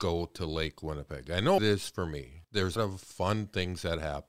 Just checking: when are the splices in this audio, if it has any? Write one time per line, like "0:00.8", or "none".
0:01.6
0:02.4
0:02.8